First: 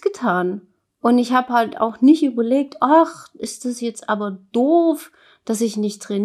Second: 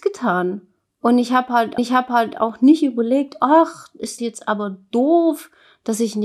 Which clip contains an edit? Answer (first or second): second